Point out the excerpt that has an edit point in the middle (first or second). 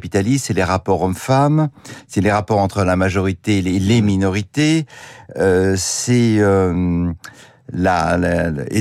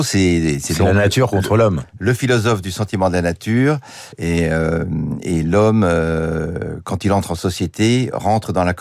second